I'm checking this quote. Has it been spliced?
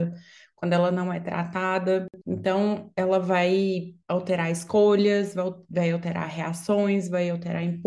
yes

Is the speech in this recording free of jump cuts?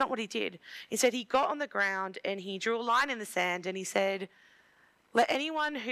yes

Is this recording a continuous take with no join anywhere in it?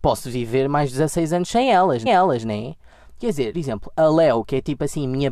no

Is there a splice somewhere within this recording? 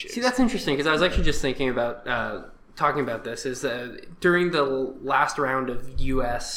no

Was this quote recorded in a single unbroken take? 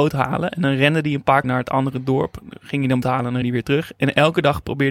no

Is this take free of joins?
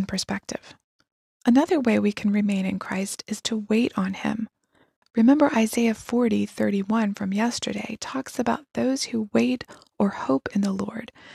yes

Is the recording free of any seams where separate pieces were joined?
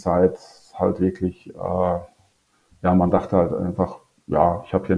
yes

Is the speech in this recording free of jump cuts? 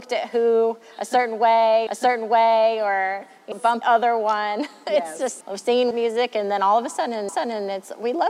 no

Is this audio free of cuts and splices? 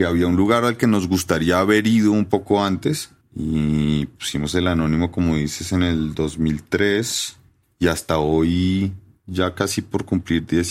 yes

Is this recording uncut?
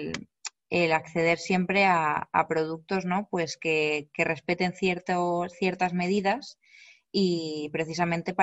yes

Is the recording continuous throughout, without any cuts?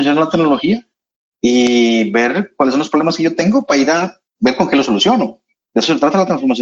yes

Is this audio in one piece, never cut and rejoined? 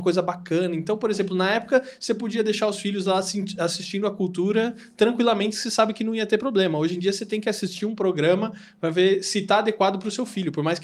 yes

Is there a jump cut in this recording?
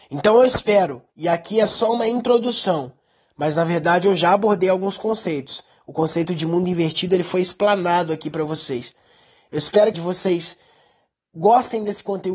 yes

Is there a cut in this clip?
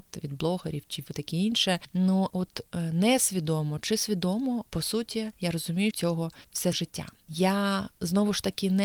yes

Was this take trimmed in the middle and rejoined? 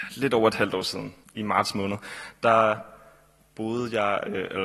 yes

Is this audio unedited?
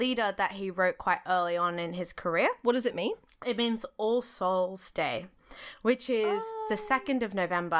yes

